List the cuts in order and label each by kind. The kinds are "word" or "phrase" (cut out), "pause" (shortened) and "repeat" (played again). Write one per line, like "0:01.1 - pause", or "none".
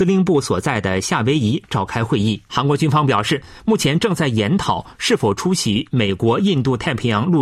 0:02.5 - pause